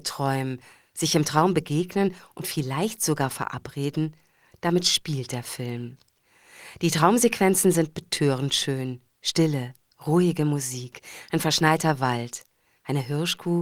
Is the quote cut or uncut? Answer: uncut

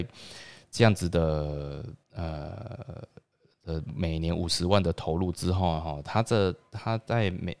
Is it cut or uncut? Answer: cut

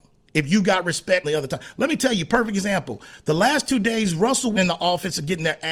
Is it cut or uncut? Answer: cut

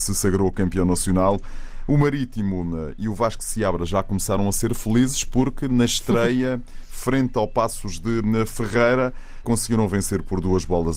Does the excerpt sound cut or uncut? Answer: cut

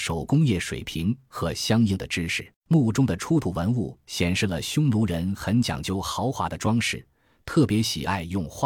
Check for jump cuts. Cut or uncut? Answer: cut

